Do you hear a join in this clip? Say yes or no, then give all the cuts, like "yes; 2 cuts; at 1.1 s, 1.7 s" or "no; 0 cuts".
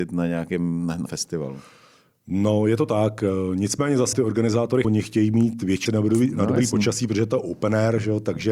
yes; 4 cuts; at 1.1 s, 4.1 s, 4.8 s, 5.9 s